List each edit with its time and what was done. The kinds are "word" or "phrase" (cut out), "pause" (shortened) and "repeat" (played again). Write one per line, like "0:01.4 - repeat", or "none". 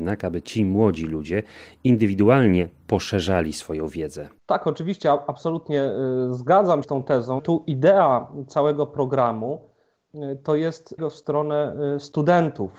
0:04.4 - pause
0:06.8 - phrase
0:07.4 - phrase
0:11.0 - word